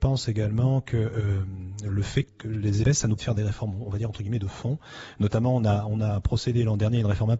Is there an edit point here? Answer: yes; 3 cuts; at 2.3 s, 2.8 s, 3.2 s

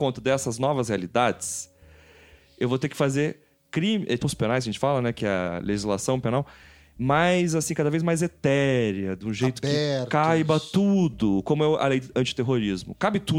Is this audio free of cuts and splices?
no; 1 cut; at 4.2 s

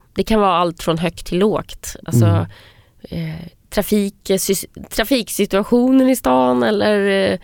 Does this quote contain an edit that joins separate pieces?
yes; 1 cut; at 2.7 s

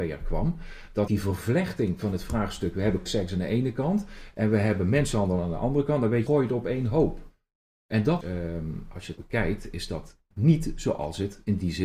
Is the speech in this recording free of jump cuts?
no; 6 cuts; at 1.1 s, 3.1 s, 6.3 s, 8.2 s, 9.2 s, 10.3 s

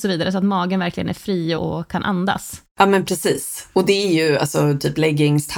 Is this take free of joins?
no; 1 cut; at 1.5 s

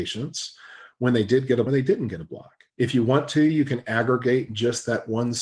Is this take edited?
yes; 2 cuts; at 1.7 s, 2.7 s

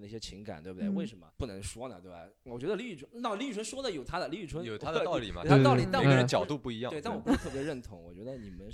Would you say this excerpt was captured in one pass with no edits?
no; 1 cut; at 1.3 s

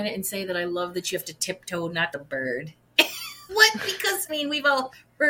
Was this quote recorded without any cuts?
no; 3 cuts; at 2.1 s, 3.5 s, 4.3 s

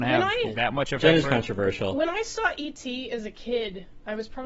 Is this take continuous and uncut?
no; 1 cut; at 1.2 s

